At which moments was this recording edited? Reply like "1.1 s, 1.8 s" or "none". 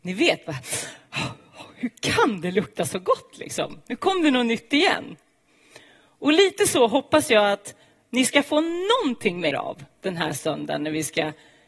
9.5 s